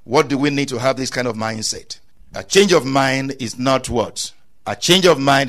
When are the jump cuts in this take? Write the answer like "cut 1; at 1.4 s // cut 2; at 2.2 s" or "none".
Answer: none